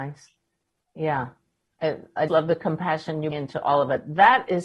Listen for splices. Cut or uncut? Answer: cut